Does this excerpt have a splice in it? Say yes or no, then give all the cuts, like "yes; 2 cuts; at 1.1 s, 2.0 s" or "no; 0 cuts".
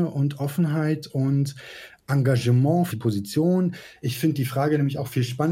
yes; 1 cut; at 2.9 s